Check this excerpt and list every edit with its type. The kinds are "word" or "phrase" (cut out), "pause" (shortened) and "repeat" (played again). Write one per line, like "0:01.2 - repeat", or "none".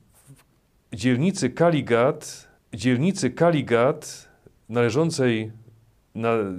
0:02.6 - repeat